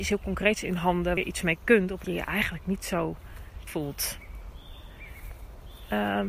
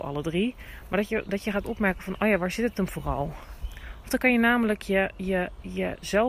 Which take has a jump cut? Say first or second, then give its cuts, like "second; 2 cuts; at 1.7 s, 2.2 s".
first; 3 cuts; at 1.2 s, 2.0 s, 3.7 s